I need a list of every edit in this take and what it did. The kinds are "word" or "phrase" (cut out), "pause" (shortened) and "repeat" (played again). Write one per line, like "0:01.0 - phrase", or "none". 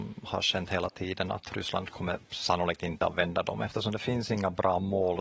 none